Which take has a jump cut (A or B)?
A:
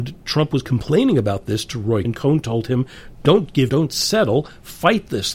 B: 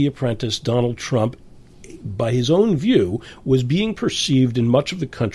A